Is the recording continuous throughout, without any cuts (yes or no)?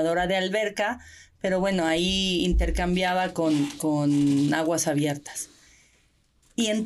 yes